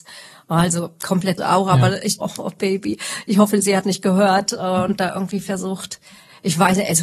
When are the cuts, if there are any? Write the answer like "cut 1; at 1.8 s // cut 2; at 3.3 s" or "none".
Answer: cut 1; at 1.4 s // cut 2; at 2.2 s // cut 3; at 3.8 s // cut 4; at 5.0 s